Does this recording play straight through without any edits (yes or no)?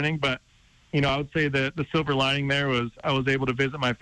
yes